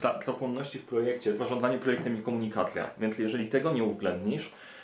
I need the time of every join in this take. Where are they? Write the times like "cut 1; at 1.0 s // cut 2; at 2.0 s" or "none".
cut 1; at 1.4 s